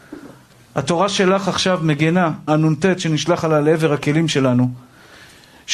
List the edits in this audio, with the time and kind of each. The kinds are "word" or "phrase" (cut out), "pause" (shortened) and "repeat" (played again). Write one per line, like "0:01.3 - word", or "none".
0:02.5 - word